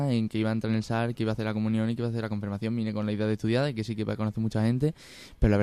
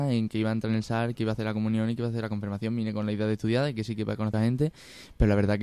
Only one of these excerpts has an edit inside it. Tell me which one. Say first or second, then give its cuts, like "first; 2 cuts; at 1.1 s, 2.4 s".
second; 1 cut; at 4.3 s